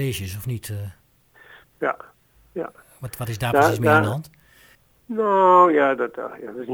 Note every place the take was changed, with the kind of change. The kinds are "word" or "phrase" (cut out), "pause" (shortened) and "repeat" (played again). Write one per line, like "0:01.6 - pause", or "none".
none